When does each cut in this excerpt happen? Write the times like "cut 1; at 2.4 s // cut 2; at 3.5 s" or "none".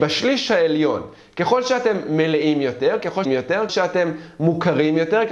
cut 1; at 3.2 s // cut 2; at 3.7 s